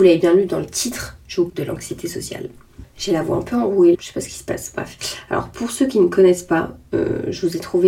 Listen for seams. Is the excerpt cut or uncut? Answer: cut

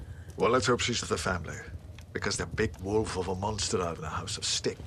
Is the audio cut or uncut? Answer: cut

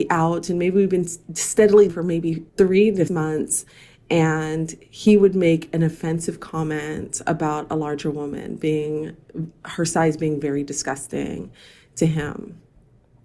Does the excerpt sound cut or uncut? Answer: cut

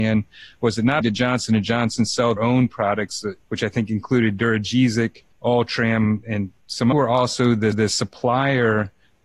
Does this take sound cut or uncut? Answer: cut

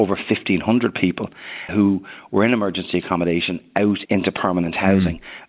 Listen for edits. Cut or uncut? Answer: cut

